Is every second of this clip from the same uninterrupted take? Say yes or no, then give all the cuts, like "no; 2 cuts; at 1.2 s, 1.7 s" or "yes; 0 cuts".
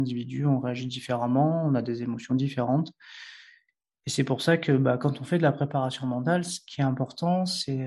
yes; 0 cuts